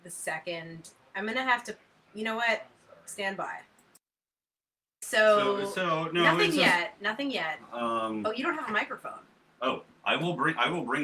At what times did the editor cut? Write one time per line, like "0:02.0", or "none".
none